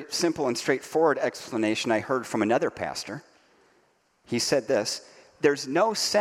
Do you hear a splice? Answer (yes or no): no